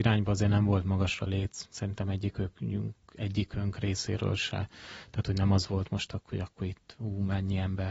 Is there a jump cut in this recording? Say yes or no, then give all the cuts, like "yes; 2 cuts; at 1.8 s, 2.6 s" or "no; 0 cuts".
yes; 1 cut; at 1.3 s